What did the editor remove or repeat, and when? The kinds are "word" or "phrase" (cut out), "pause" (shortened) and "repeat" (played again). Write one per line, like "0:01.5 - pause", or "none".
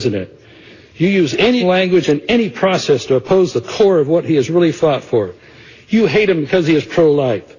0:01.6 - word